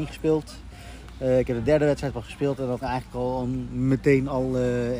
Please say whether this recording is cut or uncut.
cut